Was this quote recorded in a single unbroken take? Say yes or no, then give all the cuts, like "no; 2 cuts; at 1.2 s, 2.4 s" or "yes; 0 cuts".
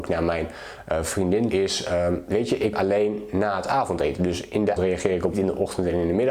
no; 4 cuts; at 1.5 s, 2.7 s, 4.8 s, 5.3 s